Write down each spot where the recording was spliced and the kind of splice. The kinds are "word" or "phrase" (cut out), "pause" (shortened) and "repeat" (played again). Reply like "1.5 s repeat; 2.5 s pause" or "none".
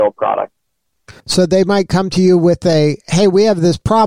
1.2 s pause